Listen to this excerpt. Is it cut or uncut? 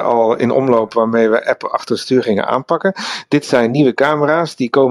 uncut